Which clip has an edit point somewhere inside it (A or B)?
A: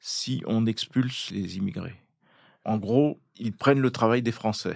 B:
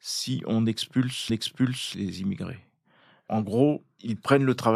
B